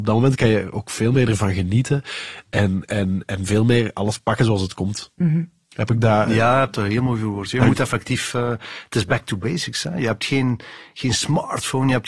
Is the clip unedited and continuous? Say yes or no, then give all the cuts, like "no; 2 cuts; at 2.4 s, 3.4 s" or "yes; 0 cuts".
no; 1 cut; at 5.1 s